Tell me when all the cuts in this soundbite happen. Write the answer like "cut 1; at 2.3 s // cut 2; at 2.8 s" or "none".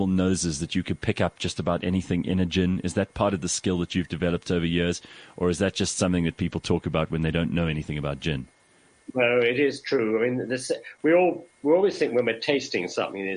none